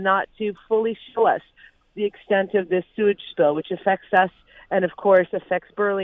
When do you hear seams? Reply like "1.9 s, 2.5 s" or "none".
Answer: none